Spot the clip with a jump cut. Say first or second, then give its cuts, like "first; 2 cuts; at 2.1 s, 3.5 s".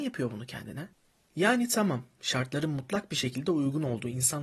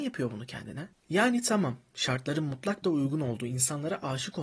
second; 2 cuts; at 1.0 s, 2.8 s